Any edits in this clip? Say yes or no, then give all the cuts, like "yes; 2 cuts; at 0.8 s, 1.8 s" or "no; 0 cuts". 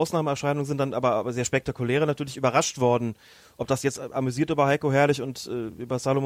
yes; 1 cut; at 4.0 s